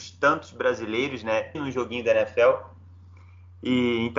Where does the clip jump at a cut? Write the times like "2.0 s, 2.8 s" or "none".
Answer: 1.5 s